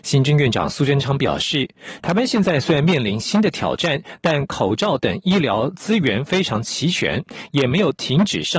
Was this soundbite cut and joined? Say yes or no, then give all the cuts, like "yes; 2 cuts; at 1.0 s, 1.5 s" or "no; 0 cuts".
no; 0 cuts